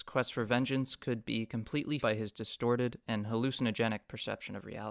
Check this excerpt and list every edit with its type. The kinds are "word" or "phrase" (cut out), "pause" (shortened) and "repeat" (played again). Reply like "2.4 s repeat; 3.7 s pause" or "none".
2.0 s word

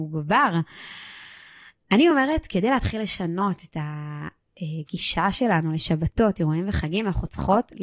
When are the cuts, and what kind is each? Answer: none

